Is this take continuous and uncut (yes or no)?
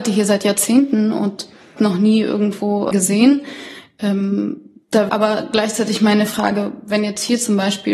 no